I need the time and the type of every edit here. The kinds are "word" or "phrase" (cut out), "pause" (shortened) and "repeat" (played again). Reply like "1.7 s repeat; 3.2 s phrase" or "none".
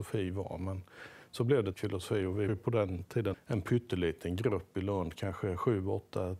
1.7 s word; 2.5 s word; 3.3 s word